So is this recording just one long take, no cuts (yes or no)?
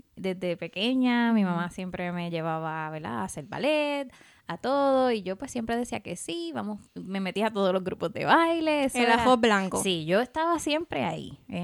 yes